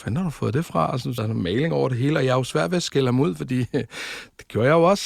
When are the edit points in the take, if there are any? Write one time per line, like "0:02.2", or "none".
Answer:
0:01.2